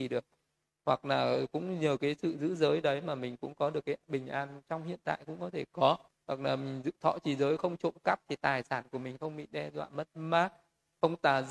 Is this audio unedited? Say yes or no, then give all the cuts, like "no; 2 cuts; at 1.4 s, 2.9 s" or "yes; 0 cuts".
no; 1 cut; at 6.1 s